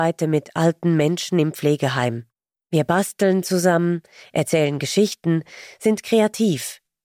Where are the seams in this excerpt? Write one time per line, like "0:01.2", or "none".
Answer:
none